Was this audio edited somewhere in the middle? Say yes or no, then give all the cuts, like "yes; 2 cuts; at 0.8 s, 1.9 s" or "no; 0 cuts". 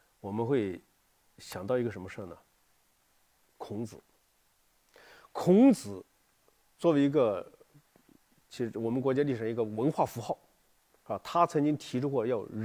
no; 0 cuts